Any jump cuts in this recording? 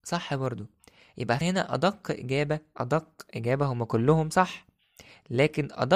yes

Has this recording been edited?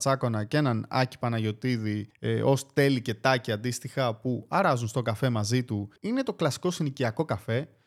no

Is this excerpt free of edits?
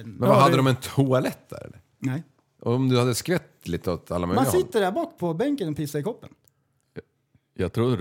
yes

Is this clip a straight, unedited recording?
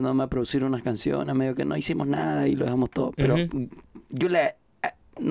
yes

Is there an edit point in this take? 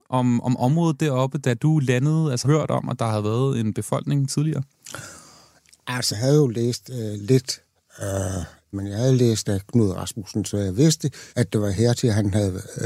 yes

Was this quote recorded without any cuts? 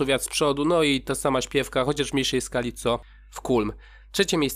yes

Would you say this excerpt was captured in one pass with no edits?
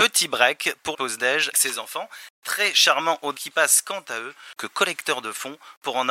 no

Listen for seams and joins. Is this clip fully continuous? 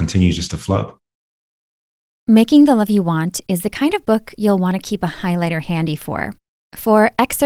yes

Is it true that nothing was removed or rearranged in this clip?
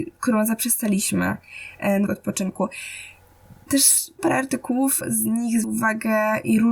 no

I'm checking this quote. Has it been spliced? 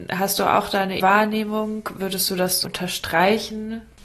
yes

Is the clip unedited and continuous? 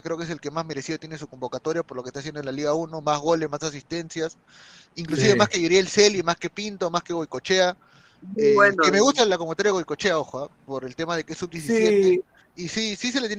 yes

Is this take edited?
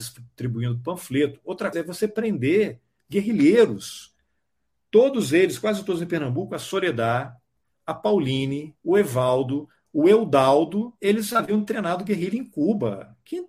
yes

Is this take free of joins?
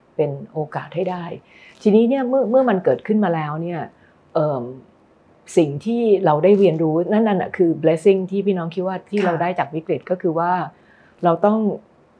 yes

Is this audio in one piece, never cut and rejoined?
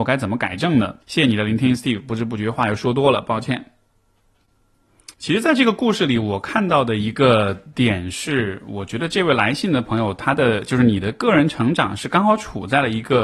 no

